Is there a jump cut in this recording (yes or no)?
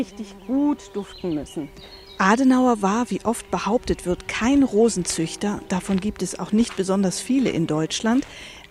no